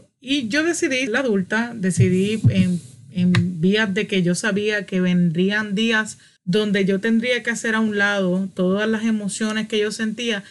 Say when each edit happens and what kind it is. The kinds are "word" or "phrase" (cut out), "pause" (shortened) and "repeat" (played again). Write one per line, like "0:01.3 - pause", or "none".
0:01.1 - word